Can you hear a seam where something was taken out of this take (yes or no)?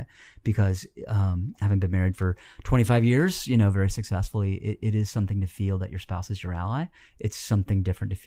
no